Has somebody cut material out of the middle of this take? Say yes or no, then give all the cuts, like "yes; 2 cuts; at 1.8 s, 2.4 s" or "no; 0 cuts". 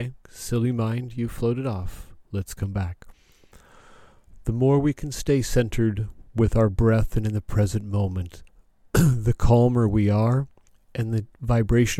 yes; 2 cuts; at 8.5 s, 10.7 s